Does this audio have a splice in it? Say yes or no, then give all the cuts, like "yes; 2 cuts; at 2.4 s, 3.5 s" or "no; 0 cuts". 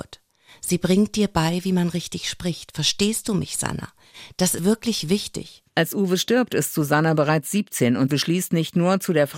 yes; 2 cuts; at 4.6 s, 8.1 s